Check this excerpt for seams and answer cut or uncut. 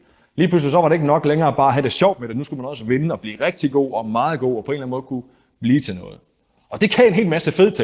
uncut